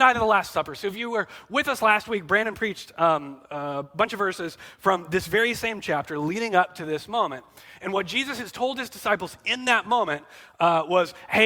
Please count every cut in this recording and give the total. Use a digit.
0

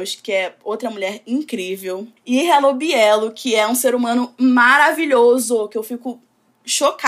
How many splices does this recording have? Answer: 1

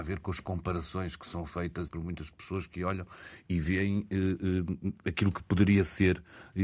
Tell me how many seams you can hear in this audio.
1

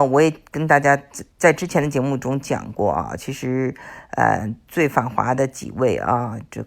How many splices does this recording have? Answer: 1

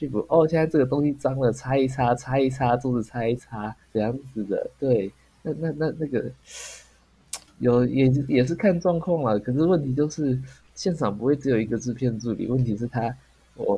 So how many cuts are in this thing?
2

